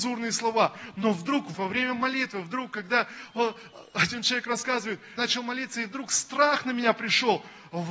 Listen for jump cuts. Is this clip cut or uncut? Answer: cut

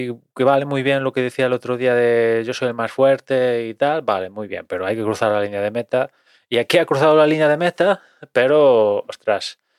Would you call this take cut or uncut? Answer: uncut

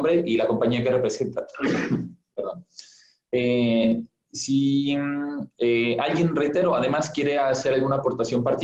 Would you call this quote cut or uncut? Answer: uncut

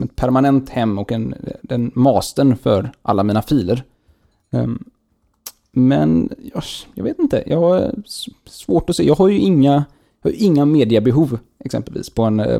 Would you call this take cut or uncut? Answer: uncut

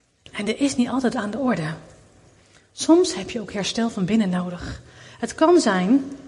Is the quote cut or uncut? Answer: uncut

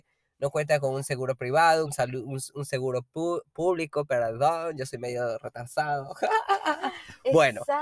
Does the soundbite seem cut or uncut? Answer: uncut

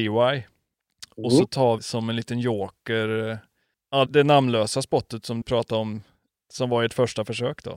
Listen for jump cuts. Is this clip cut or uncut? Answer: cut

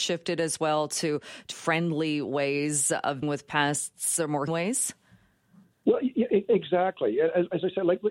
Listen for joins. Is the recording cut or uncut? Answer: cut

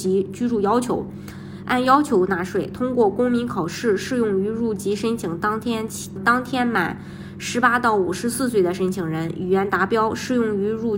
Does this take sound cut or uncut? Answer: cut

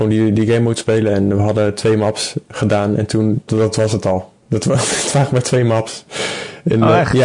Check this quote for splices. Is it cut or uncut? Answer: cut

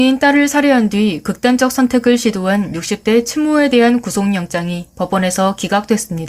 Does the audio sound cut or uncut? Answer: uncut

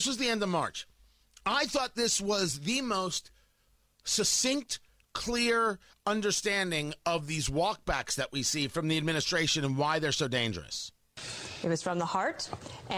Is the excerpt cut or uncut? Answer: uncut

